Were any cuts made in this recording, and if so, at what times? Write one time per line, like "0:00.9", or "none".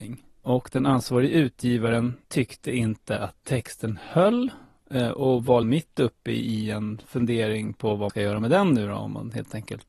0:02.2
0:03.4
0:05.6
0:08.1